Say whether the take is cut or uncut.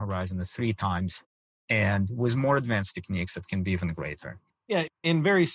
uncut